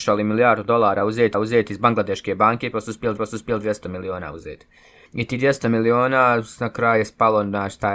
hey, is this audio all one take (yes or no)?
no